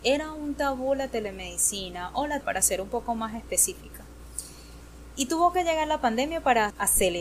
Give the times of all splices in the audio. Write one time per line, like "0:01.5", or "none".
0:02.4